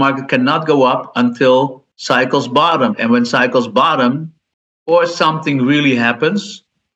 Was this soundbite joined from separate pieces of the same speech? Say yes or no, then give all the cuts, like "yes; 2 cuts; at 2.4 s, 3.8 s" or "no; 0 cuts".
yes; 2 cuts; at 1.9 s, 4.5 s